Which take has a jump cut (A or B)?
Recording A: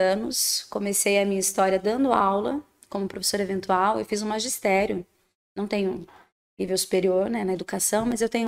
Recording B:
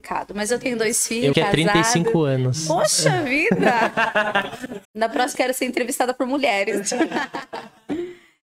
B